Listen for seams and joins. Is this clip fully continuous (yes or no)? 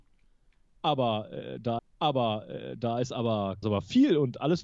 no